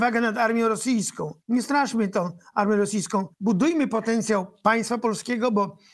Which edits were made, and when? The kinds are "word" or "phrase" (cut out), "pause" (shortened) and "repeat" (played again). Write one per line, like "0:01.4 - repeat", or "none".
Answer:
0:01.4 - pause
0:03.3 - pause

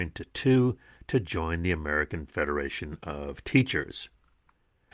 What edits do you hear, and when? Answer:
none

